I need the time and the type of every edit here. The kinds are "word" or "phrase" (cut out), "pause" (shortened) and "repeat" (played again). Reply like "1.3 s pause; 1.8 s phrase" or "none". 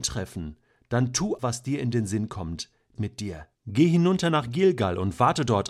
1.4 s word; 3.0 s phrase; 3.5 s pause